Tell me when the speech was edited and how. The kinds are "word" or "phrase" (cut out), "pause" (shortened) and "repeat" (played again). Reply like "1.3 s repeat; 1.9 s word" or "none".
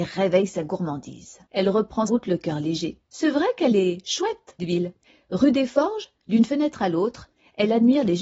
1.5 s pause; 2.1 s word; 3.0 s pause; 4.6 s word; 5.0 s pause